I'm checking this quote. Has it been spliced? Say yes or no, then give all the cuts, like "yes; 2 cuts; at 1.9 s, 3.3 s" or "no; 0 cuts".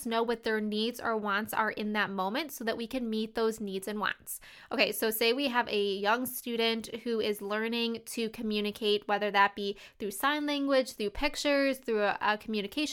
no; 0 cuts